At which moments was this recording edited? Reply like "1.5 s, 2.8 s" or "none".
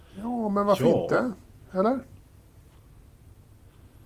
none